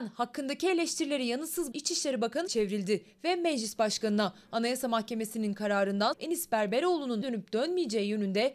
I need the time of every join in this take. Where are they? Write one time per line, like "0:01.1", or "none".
0:01.7
0:02.5
0:06.1
0:07.2

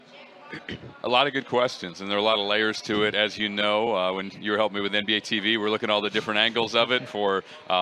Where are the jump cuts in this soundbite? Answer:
none

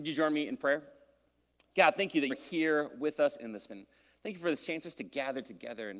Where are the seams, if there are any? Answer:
0:01.4
0:02.3
0:03.7

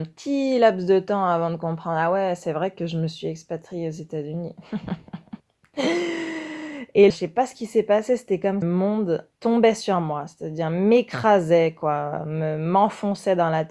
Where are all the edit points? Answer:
0:05.4
0:07.1
0:08.6
0:09.3

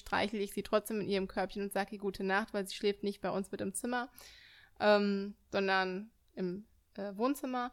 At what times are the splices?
none

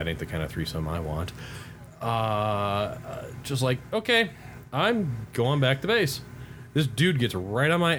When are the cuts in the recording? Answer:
none

